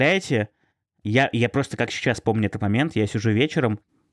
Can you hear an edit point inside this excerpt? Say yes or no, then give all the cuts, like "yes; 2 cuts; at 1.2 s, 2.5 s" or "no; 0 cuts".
no; 0 cuts